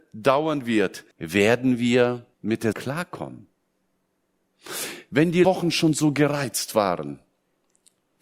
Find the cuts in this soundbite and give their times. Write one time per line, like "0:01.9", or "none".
0:01.1
0:02.3
0:02.7
0:05.4

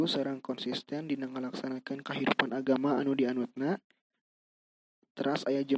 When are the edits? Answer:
none

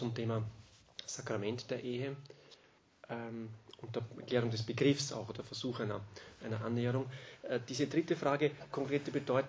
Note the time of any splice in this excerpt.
0:02.8

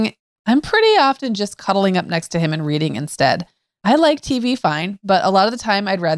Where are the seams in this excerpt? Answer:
none

